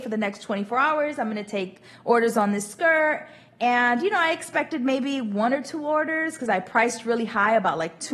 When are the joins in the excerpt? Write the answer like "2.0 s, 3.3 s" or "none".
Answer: none